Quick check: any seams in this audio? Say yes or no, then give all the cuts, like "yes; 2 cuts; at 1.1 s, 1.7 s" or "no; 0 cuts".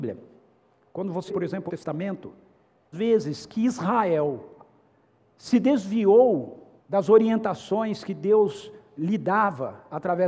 yes; 4 cuts; at 1.3 s, 1.7 s, 2.9 s, 6.8 s